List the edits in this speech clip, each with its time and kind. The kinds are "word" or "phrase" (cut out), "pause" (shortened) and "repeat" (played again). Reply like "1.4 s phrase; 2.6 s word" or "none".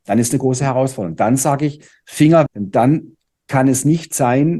2.5 s word